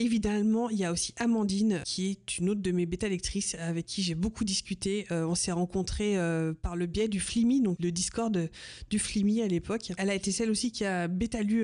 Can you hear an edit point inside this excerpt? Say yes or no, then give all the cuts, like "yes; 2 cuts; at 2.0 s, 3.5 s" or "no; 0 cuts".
yes; 1 cut; at 7.8 s